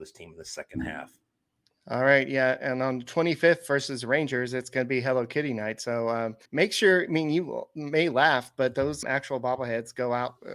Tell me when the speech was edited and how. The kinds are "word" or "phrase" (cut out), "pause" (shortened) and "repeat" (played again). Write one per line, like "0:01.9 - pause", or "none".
0:06.5 - pause
0:09.0 - word

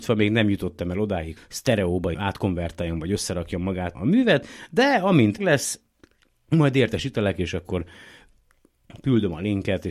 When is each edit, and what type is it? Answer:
0:01.4 - word
0:02.1 - word
0:04.0 - word
0:05.4 - word

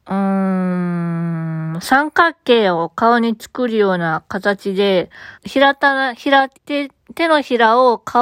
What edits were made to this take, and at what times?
0:05.3 - pause
0:06.5 - pause

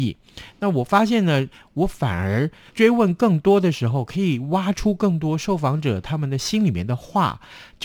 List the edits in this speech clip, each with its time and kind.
0:02.7 - word

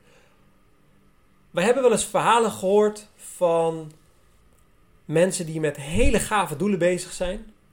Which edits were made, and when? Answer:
none

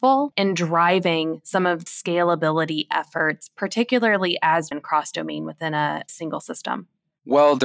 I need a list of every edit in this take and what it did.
0:01.9 - word
0:04.7 - phrase

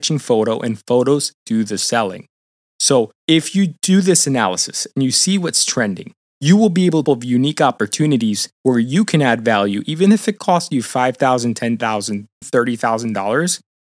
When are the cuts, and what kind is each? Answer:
0:03.2 - pause
0:06.2 - pause
0:07.0 - phrase
0:08.5 - pause
0:12.4 - word

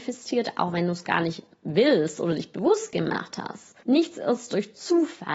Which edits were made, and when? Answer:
0:03.8 - pause

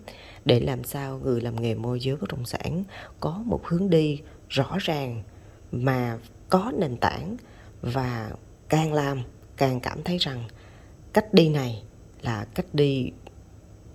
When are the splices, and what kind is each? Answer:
none

